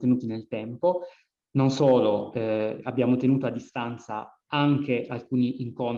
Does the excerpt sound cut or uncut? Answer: uncut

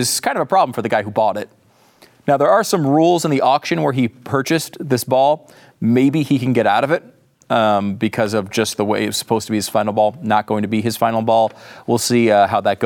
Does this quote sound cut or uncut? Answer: uncut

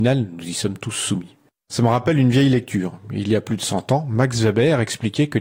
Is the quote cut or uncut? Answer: uncut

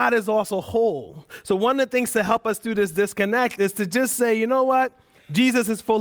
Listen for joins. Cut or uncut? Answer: uncut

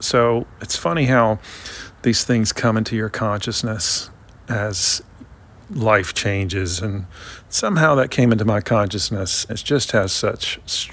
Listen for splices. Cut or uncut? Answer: cut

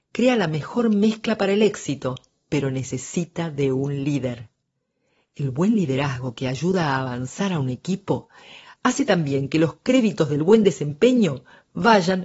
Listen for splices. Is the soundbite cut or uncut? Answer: uncut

